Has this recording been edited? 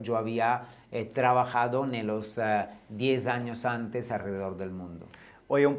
no; 0 cuts

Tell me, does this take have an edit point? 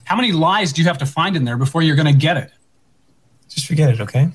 no; 0 cuts

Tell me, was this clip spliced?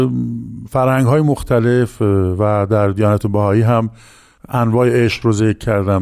no; 0 cuts

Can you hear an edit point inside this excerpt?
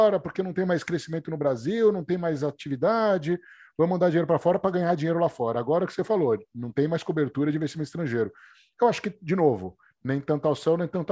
no; 0 cuts

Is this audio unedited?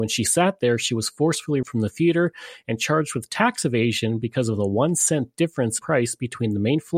no; 2 cuts; at 1.6 s, 5.8 s

